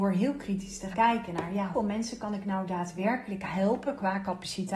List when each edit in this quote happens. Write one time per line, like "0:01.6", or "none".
0:00.9
0:01.7